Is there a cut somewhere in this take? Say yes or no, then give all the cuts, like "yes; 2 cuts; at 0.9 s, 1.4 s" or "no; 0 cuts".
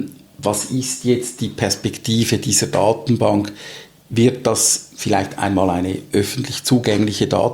no; 0 cuts